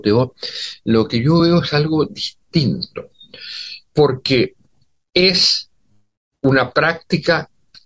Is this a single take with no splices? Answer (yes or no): yes